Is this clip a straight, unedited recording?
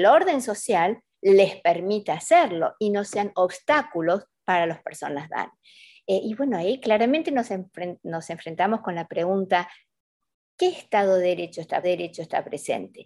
no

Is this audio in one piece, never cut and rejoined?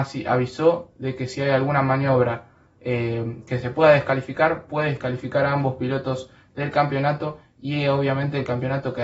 yes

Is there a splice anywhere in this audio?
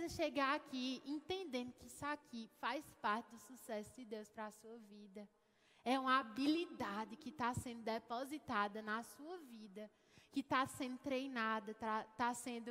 no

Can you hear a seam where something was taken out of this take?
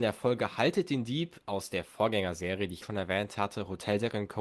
yes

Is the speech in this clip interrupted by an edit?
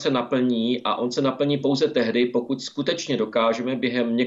no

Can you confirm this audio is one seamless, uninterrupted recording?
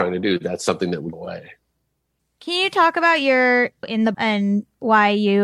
no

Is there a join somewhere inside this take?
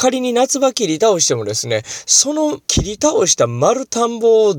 yes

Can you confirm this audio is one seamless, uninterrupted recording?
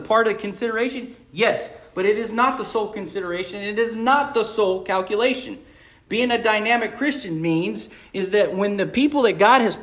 yes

